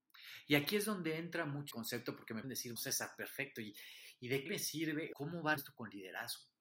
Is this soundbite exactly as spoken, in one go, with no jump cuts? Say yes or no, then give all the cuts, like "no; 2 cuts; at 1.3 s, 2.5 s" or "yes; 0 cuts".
no; 6 cuts; at 1.7 s, 2.4 s, 2.8 s, 4.5 s, 5.1 s, 5.6 s